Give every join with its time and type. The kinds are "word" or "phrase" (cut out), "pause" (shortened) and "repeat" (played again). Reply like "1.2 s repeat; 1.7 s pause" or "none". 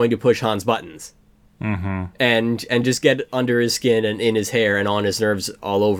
none